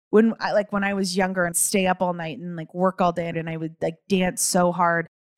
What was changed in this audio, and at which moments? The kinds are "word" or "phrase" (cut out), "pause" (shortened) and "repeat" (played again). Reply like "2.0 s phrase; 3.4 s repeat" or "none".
1.5 s word; 3.3 s phrase